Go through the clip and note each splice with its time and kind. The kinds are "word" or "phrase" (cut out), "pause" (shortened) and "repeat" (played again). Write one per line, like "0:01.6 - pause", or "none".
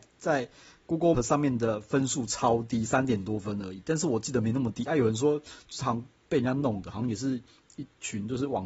0:01.1 - word